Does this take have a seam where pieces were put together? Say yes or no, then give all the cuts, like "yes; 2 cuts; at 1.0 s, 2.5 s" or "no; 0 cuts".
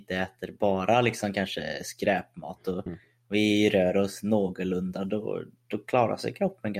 no; 0 cuts